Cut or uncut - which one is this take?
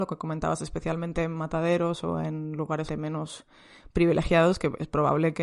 cut